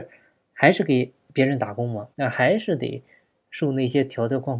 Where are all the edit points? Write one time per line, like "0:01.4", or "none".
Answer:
0:02.1